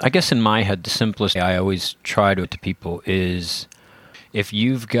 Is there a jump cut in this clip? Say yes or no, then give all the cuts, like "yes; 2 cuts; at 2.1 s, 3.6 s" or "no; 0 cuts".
yes; 2 cuts; at 1.4 s, 2.4 s